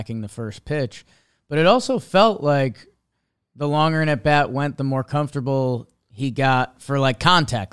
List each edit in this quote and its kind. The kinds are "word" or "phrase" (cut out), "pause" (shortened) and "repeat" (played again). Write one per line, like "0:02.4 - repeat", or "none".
none